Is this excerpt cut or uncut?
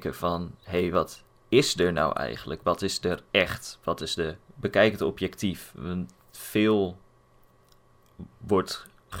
cut